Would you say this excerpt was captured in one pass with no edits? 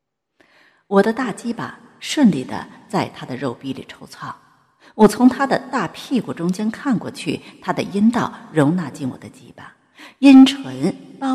yes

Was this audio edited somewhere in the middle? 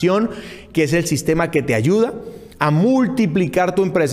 yes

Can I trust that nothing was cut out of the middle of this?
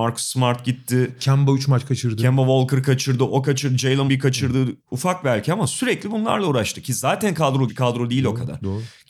no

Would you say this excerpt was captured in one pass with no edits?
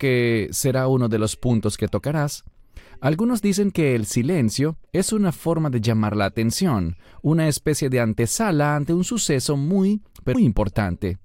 no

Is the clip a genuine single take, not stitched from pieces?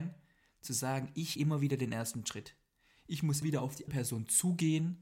no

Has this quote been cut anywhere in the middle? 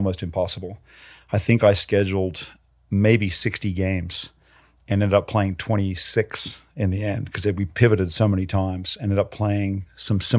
no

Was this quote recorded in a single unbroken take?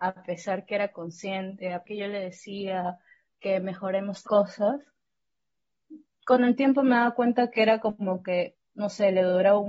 no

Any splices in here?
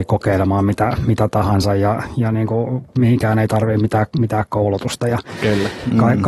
no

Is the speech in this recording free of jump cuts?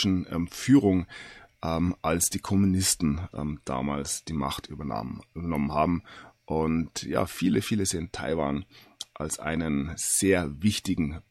yes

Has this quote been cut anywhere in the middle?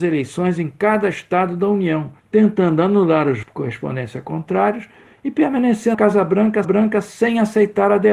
yes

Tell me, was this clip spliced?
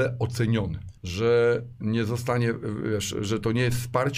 yes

